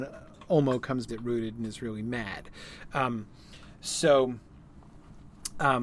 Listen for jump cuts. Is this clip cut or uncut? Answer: cut